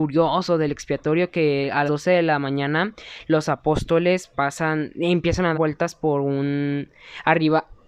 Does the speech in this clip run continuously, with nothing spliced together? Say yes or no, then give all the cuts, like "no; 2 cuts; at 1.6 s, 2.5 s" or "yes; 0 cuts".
no; 3 cuts; at 1.9 s, 4.3 s, 5.5 s